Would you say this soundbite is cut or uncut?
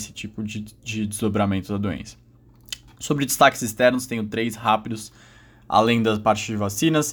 uncut